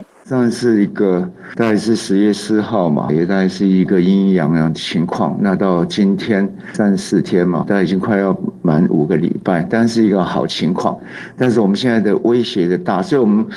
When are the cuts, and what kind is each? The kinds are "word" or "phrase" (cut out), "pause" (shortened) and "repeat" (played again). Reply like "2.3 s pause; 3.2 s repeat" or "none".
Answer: 3.1 s word; 7.6 s word